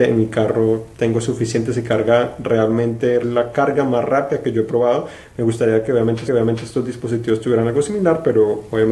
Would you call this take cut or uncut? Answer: cut